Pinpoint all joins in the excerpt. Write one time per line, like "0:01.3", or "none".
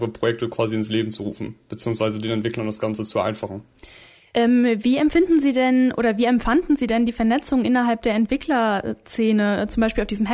none